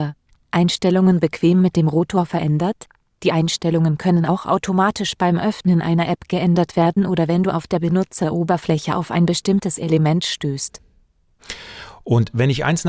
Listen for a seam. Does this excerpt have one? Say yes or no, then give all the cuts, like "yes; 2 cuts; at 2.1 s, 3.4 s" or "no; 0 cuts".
no; 0 cuts